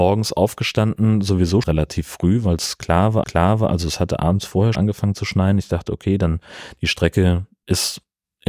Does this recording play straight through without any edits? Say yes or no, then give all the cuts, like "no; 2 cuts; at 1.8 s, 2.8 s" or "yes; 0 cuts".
no; 3 cuts; at 1.6 s, 3.2 s, 4.7 s